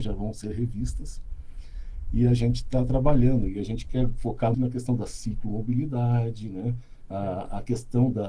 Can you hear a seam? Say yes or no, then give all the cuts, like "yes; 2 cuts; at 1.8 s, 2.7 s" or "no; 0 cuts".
yes; 1 cut; at 4.5 s